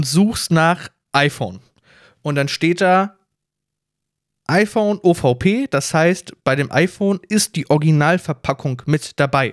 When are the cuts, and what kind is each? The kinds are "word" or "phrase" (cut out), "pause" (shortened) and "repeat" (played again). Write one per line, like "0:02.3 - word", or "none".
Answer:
none